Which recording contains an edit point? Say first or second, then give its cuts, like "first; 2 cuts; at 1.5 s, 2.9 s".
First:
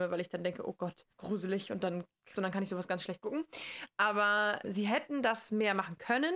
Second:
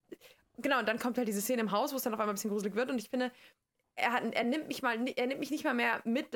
first; 3 cuts; at 1.1 s, 2.4 s, 4.6 s